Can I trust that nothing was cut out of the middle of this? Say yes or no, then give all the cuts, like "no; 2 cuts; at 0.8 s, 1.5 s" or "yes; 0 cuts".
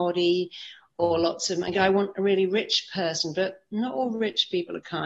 yes; 0 cuts